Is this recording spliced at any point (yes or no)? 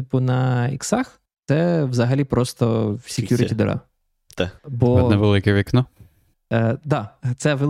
yes